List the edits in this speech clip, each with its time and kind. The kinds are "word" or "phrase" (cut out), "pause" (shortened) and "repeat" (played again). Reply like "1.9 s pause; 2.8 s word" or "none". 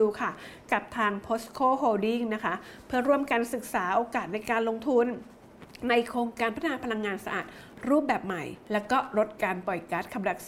8.6 s pause